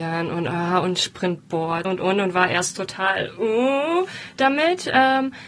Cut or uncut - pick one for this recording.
cut